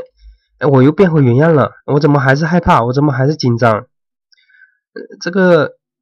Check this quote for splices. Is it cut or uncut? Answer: cut